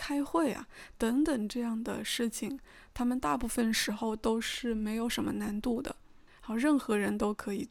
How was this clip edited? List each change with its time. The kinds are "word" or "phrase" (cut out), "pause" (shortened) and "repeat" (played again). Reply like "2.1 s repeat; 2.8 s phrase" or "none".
6.3 s pause

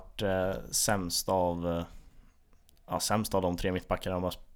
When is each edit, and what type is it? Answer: none

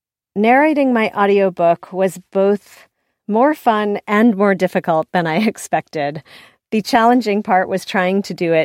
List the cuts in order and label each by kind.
none

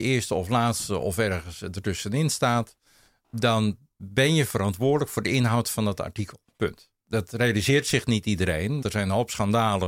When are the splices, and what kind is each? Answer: 7.0 s pause; 8.8 s word

